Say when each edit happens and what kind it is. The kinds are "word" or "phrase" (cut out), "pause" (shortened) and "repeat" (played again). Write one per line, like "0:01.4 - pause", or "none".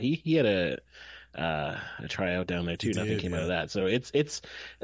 none